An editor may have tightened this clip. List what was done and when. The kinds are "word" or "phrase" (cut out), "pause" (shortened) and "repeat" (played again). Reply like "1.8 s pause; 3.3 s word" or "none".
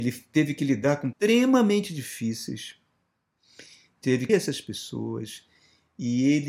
1.1 s word; 4.3 s word